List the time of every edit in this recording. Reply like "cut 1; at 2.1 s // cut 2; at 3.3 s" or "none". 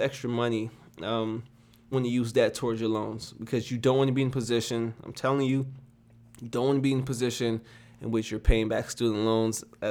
cut 1; at 1.9 s